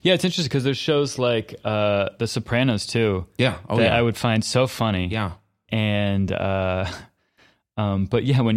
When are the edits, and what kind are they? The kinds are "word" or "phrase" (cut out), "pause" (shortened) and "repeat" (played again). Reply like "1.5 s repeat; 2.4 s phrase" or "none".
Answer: none